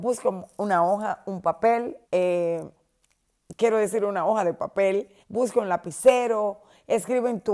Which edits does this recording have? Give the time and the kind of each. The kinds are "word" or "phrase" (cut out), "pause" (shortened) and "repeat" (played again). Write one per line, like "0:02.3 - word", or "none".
0:02.0 - pause
0:05.2 - pause